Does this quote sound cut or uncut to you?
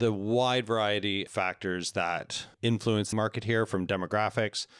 cut